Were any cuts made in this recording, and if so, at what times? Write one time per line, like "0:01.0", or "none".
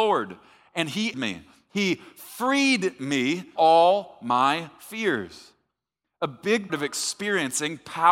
0:01.1
0:03.6
0:06.7